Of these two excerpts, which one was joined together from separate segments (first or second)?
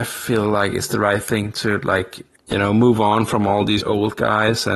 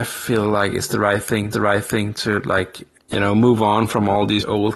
second